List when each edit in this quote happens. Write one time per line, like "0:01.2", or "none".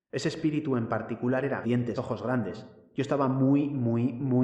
0:01.6
0:02.0

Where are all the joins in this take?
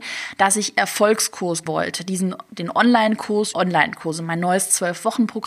0:01.7
0:03.5

